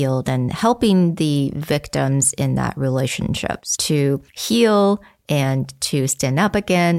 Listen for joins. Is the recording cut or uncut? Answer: cut